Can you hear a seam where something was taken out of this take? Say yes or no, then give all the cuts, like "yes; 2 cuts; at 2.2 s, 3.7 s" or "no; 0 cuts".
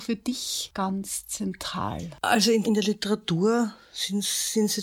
yes; 1 cut; at 2.6 s